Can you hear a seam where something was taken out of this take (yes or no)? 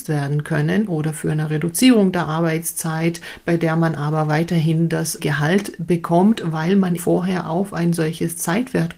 yes